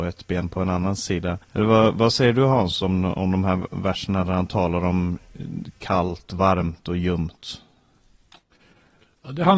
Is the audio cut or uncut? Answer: cut